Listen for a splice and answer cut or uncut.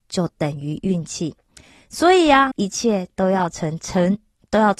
cut